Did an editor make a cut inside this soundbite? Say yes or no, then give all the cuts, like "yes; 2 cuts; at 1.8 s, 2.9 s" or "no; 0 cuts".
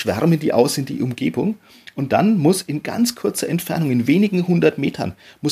no; 0 cuts